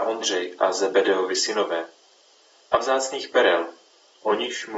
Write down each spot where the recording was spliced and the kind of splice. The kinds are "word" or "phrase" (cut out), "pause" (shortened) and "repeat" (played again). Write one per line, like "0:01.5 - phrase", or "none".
none